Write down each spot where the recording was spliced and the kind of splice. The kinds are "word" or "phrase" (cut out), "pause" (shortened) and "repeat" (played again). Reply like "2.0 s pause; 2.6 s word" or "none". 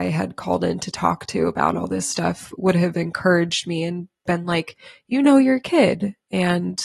none